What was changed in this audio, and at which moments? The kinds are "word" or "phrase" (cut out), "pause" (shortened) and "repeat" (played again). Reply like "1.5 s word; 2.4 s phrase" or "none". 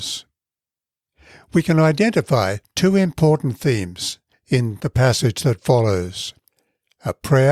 none

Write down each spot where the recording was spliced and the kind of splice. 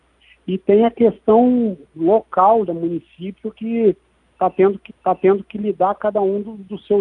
2.7 s phrase; 4.9 s repeat

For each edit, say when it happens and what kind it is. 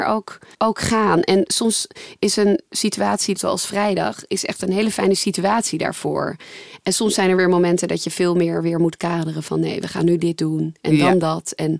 none

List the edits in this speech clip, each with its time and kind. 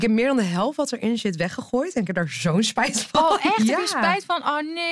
none

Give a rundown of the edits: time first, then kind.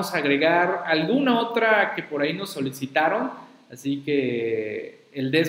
none

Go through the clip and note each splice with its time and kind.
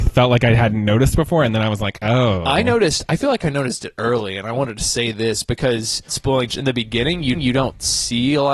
6.1 s word; 6.5 s phrase; 7.3 s repeat

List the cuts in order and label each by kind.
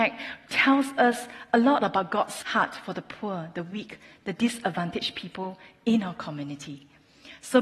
none

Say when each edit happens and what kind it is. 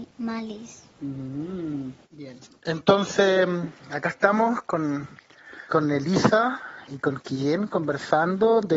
2.0 s pause; 5.7 s pause

